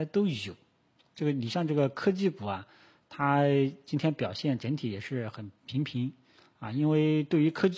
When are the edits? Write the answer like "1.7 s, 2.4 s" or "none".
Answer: none